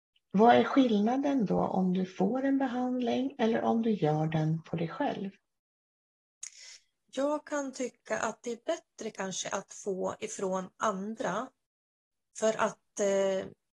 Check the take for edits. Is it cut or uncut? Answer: uncut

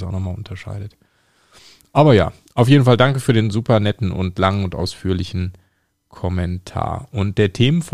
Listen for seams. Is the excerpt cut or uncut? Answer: uncut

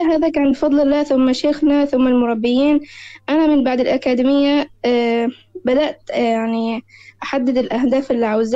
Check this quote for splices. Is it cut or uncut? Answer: uncut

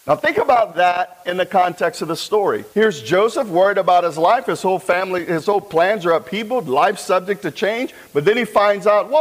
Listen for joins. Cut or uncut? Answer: cut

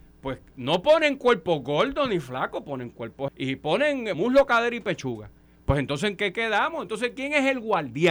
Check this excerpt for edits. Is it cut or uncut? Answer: cut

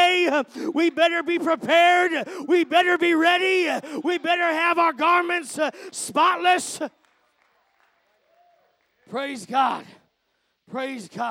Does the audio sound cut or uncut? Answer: uncut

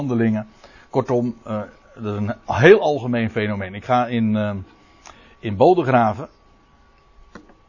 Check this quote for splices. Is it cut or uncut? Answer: uncut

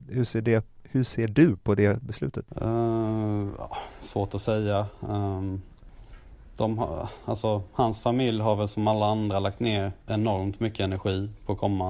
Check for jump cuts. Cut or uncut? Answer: cut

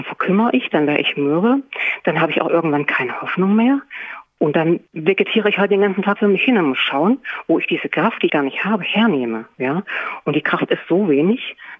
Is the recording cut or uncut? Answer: cut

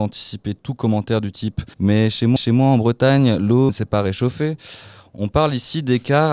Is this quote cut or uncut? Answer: cut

